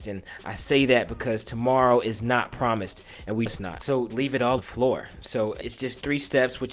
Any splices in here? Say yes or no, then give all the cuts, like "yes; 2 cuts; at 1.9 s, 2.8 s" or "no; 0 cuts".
yes; 4 cuts; at 3.5 s, 4.1 s, 4.6 s, 5.6 s